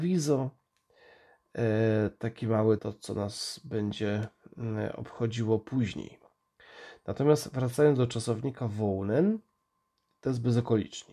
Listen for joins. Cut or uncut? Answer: cut